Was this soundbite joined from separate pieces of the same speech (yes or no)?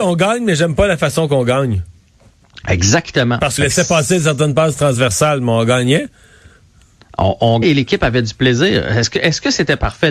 yes